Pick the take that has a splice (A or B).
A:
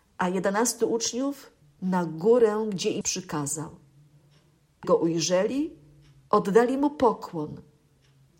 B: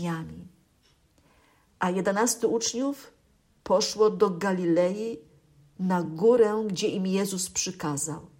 A